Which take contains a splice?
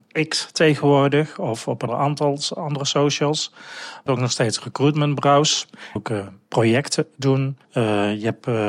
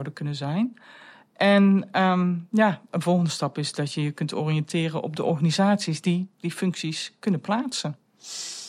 first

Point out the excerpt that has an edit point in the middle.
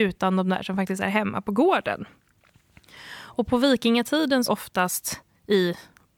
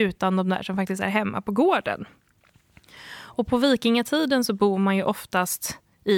first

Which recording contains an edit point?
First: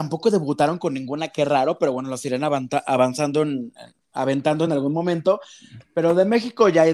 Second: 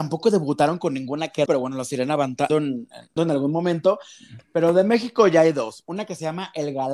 second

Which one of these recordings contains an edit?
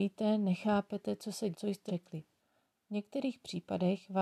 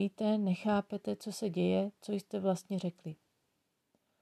first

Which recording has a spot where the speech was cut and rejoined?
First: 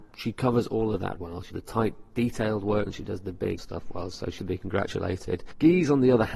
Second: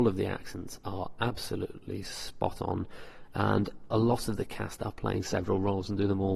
first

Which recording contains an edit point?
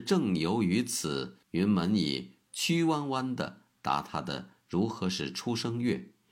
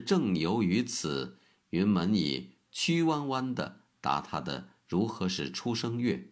first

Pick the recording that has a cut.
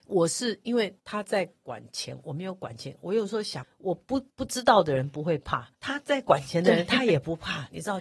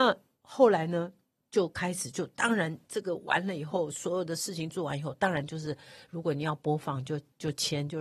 first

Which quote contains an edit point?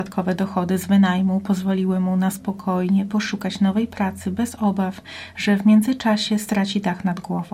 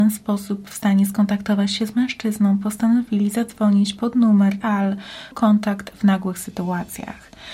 second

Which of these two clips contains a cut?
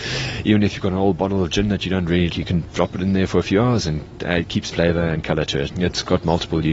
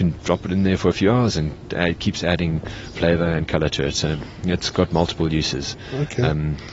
first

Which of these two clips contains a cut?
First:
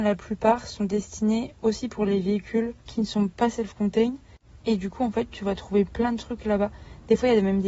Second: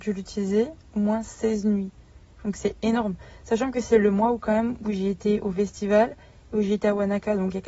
first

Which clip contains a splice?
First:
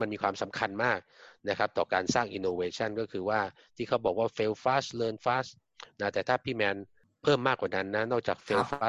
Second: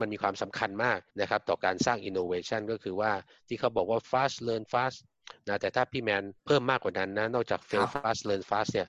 second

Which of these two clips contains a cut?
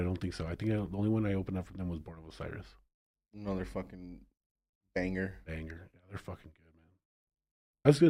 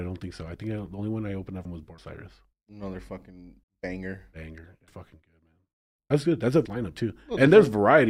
second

